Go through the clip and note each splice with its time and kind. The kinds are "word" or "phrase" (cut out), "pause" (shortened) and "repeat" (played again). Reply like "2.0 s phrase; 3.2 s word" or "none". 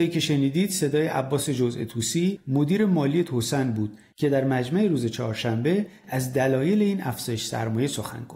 none